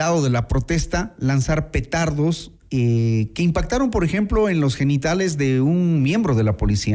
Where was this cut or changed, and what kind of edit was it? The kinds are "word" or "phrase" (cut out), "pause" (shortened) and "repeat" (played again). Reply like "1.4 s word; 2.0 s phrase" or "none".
none